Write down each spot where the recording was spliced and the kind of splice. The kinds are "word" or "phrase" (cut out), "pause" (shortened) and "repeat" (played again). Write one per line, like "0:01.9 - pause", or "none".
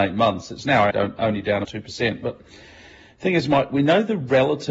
0:00.9 - word
0:01.6 - word